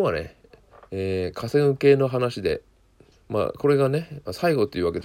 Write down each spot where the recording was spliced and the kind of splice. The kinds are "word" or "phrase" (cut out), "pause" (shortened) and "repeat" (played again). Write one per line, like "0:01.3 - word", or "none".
0:03.1 - pause